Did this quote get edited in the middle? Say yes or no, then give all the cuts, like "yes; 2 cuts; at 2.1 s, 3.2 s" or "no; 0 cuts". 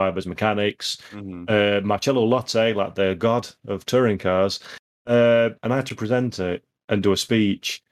yes; 1 cut; at 5.6 s